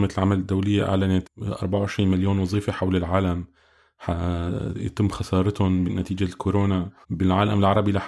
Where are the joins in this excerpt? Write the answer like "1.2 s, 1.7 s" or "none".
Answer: 1.2 s, 7.0 s